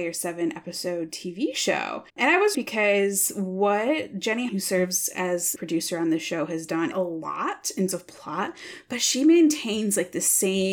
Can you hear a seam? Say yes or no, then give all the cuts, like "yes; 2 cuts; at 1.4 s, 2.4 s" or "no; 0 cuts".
yes; 6 cuts; at 2.1 s, 2.5 s, 4.5 s, 5.6 s, 6.9 s, 7.9 s